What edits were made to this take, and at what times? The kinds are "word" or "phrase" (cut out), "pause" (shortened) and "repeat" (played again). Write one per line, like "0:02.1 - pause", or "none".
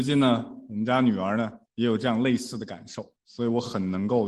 0:01.7 - pause
0:03.2 - pause